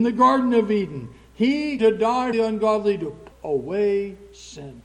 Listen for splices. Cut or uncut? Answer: cut